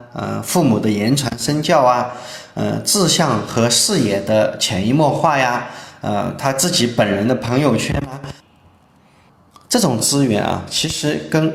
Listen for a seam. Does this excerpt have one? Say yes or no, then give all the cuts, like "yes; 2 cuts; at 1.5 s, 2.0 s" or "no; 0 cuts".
no; 0 cuts